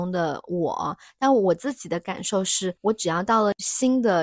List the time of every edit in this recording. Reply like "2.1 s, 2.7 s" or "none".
2.8 s